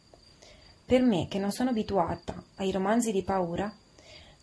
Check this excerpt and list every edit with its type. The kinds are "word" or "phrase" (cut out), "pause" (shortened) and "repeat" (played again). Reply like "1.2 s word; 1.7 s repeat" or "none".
none